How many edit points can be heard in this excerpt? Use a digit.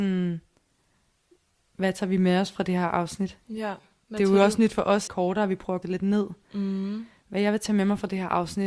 3